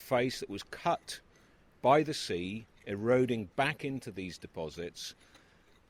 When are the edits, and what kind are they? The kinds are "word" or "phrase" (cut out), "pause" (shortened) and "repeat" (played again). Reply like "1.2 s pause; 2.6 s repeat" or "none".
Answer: none